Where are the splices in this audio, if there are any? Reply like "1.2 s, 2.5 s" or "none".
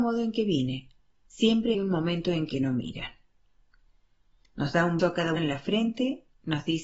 1.7 s, 5.0 s, 5.4 s